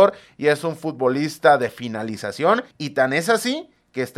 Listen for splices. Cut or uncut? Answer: cut